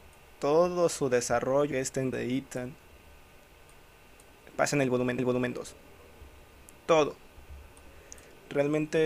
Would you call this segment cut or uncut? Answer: cut